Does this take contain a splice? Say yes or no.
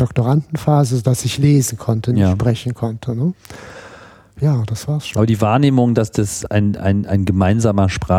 no